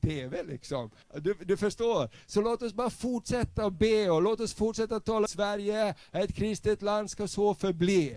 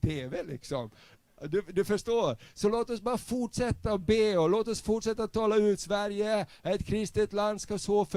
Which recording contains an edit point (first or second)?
first